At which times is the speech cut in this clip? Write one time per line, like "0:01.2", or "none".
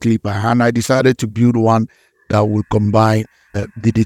none